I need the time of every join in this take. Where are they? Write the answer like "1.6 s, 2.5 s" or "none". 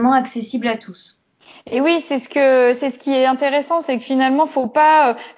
none